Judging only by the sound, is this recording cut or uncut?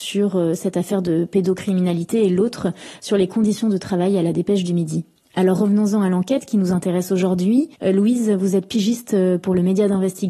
cut